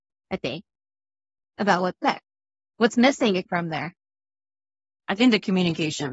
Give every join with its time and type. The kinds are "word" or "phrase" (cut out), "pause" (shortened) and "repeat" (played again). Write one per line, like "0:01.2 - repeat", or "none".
none